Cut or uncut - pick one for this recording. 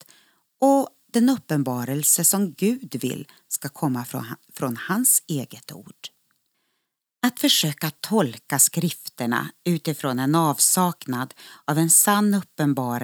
cut